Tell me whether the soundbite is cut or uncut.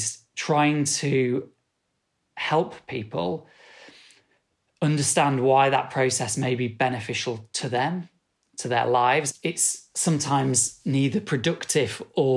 uncut